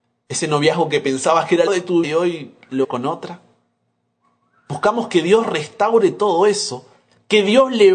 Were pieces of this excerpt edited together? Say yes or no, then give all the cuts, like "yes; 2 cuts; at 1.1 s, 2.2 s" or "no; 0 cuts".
yes; 3 cuts; at 1.7 s, 2.0 s, 2.8 s